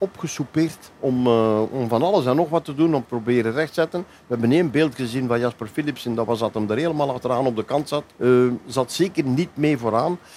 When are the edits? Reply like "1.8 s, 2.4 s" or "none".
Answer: 8.1 s